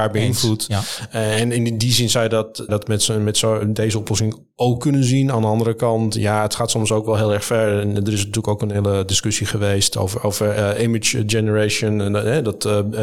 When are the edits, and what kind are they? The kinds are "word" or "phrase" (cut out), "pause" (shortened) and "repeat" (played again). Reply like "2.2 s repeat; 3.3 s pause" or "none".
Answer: 2.7 s word